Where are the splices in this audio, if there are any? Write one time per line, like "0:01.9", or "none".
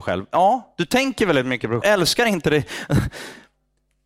0:01.8